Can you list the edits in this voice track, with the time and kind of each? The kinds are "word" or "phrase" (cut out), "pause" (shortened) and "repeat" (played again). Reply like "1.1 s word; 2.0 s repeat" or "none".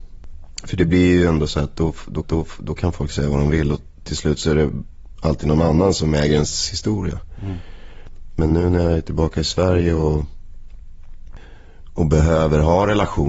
2.2 s repeat